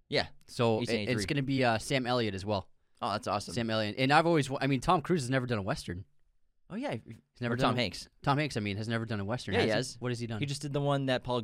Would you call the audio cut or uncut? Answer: uncut